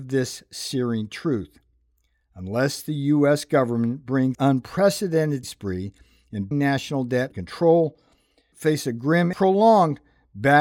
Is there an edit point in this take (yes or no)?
yes